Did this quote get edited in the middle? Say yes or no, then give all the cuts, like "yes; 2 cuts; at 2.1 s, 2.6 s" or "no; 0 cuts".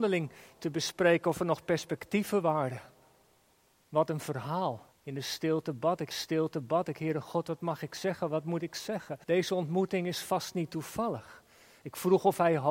yes; 3 cuts; at 4.9 s, 6.1 s, 9.2 s